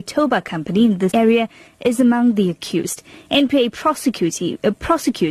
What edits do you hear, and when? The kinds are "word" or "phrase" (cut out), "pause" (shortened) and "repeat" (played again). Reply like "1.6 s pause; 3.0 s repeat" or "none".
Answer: 1.1 s word